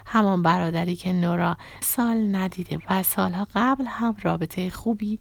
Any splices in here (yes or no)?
yes